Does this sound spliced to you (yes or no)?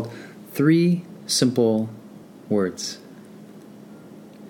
no